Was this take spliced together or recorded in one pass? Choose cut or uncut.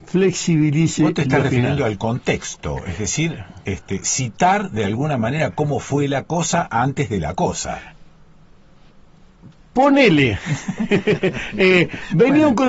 uncut